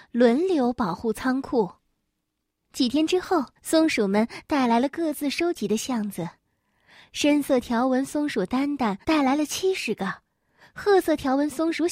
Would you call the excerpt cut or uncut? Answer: cut